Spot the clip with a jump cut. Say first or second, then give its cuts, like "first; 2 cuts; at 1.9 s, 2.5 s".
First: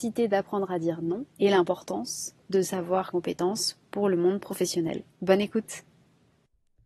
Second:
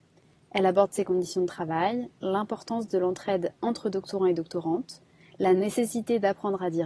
first; 3 cuts; at 1.3 s, 3.1 s, 5.1 s